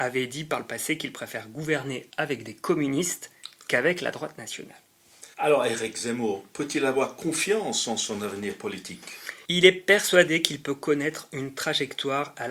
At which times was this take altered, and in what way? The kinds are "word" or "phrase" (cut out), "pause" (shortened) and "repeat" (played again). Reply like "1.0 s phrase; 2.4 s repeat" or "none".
5.3 s pause; 9.4 s pause